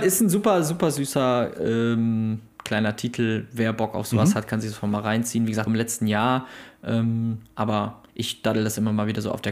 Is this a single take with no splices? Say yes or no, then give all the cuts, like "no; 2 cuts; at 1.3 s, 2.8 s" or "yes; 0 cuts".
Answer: no; 2 cuts; at 5.7 s, 8.1 s